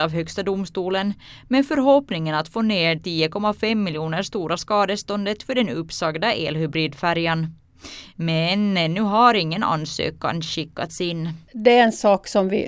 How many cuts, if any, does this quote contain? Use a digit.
1